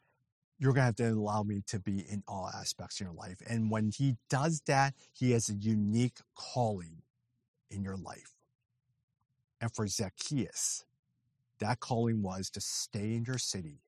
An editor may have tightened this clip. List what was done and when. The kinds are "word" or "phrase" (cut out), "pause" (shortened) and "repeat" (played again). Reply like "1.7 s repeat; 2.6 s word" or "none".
none